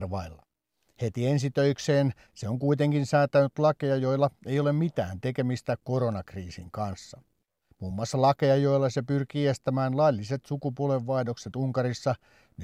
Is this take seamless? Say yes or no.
yes